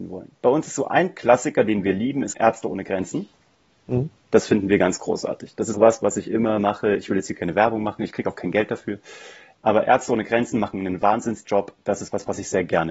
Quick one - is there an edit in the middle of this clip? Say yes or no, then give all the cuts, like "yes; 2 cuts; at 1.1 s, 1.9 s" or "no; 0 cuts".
yes; 2 cuts; at 2.3 s, 5.7 s